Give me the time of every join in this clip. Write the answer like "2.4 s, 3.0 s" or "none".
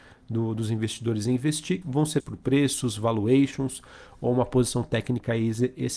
1.8 s, 2.2 s